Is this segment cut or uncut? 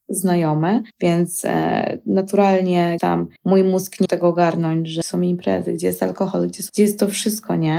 cut